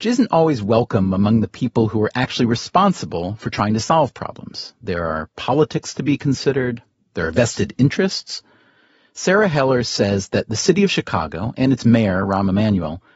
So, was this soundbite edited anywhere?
no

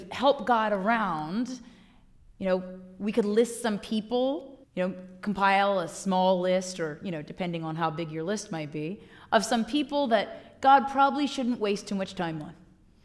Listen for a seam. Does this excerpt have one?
yes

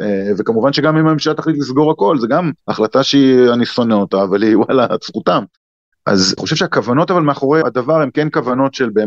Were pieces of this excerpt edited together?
yes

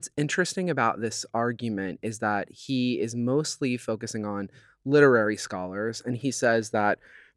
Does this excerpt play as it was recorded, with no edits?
yes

